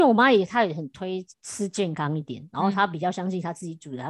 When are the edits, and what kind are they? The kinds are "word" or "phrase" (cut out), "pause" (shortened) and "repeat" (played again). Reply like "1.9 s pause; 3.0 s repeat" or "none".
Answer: 1.3 s pause